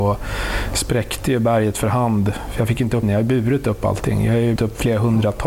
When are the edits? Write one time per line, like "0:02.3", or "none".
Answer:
0:03.0
0:04.6